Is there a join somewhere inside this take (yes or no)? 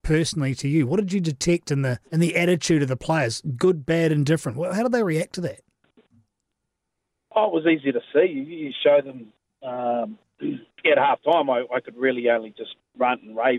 yes